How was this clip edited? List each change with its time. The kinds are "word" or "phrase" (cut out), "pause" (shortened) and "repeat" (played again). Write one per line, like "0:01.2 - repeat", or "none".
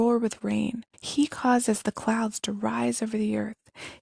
0:00.9 - pause